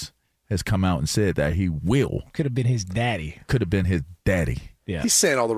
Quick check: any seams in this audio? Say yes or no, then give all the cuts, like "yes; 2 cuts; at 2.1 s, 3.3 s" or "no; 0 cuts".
no; 0 cuts